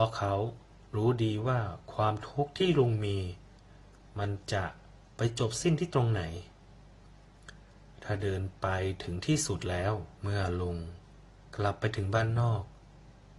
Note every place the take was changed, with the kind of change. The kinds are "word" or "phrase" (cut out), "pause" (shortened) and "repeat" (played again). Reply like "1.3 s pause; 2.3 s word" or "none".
10.1 s pause